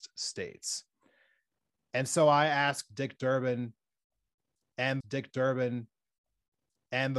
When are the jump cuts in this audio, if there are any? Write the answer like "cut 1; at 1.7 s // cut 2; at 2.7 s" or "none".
cut 1; at 5.0 s